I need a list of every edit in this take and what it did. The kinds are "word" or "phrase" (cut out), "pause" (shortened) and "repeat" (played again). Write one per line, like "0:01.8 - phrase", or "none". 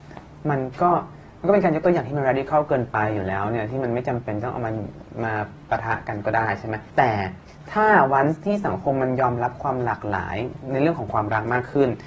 0:06.9 - pause